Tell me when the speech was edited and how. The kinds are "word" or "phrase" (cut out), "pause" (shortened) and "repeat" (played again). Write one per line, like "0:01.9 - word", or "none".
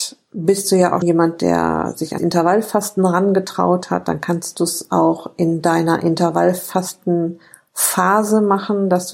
0:01.0 - word
0:02.2 - word